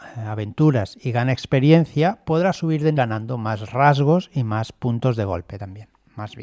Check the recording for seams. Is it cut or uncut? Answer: cut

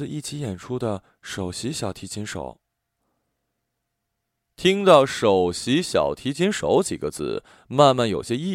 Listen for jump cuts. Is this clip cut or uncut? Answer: uncut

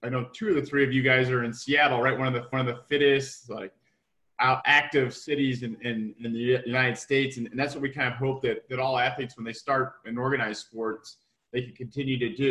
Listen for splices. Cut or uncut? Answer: cut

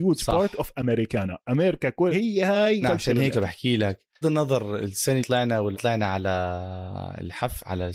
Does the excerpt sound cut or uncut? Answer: cut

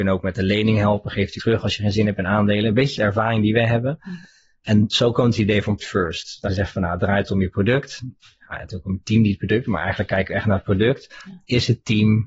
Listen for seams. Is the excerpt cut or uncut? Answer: cut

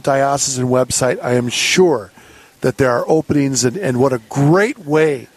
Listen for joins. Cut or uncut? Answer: uncut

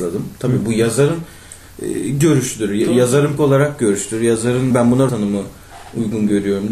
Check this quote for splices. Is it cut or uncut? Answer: cut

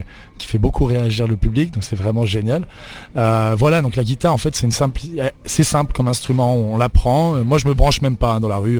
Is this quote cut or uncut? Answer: uncut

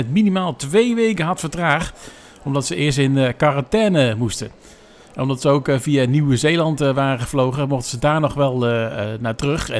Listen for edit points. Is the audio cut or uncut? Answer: uncut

